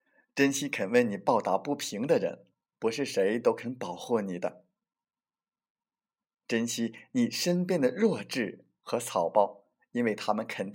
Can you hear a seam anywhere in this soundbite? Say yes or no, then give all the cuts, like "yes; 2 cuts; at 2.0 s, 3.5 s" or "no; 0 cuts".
no; 0 cuts